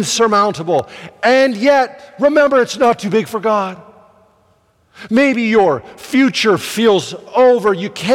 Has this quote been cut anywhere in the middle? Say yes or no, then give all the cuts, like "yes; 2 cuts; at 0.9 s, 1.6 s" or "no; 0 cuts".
no; 0 cuts